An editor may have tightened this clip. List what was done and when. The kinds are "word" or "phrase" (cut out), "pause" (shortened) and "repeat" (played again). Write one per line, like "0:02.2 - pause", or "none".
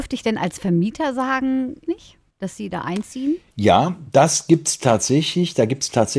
0:01.9 - phrase